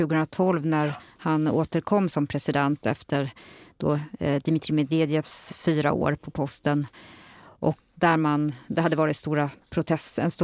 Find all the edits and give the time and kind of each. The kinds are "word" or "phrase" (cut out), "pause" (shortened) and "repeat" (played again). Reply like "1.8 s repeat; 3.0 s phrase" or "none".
2.1 s word; 5.5 s word; 7.9 s word